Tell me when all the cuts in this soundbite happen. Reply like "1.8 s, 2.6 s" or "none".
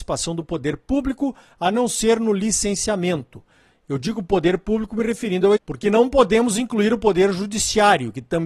5.6 s